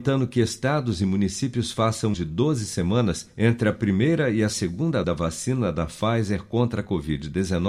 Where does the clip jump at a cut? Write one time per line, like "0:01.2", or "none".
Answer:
0:02.1
0:05.0